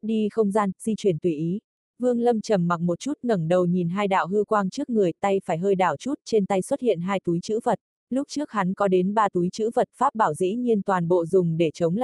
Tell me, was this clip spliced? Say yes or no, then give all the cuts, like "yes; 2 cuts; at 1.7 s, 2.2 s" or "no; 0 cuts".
yes; 2 cuts; at 1.8 s, 8.0 s